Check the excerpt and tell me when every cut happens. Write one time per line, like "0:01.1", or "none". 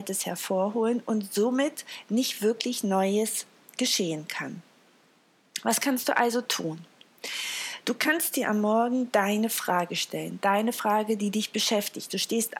none